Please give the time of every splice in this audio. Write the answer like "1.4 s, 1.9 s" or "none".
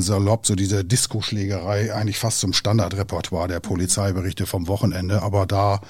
none